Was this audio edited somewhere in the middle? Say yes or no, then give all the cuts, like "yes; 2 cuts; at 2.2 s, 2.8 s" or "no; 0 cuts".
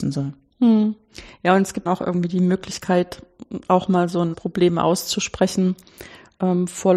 yes; 2 cuts; at 1.9 s, 4.3 s